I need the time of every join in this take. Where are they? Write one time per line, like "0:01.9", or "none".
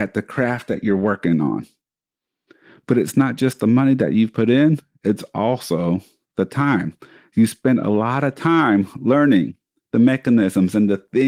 none